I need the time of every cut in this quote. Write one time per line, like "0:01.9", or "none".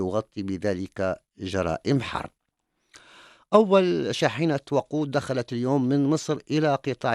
none